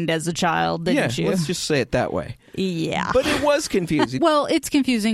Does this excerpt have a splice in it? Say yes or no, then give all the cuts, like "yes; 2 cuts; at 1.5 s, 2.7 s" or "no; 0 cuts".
no; 0 cuts